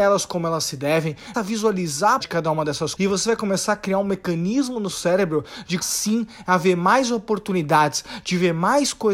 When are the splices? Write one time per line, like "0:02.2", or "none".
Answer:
0:01.3
0:02.2
0:03.0
0:04.9
0:05.8